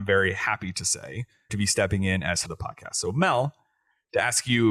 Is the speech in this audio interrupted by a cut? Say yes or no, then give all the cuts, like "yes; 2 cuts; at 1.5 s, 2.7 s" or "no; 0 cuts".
yes; 2 cuts; at 1.5 s, 2.4 s